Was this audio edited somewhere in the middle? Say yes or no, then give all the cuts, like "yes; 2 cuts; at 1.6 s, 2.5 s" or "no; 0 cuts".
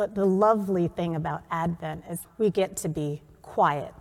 yes; 1 cut; at 2.2 s